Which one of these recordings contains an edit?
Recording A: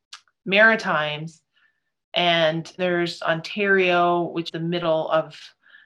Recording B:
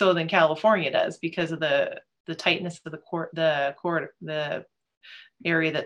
A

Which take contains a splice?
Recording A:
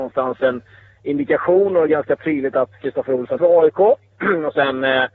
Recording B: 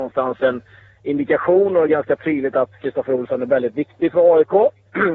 A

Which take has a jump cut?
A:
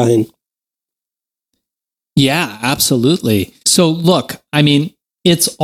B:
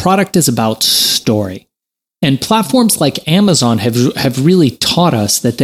A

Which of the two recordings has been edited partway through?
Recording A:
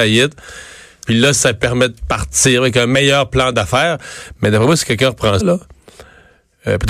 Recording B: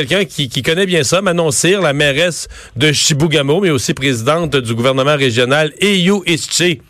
A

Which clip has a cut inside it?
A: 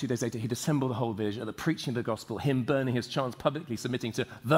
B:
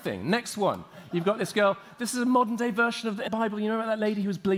B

